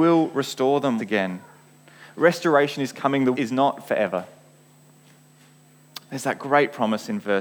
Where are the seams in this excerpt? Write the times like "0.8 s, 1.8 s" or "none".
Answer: 1.0 s, 3.3 s